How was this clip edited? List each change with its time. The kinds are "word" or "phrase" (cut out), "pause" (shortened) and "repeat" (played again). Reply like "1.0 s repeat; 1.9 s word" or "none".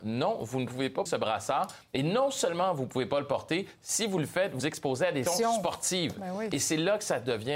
1.1 s word; 4.6 s word; 5.3 s word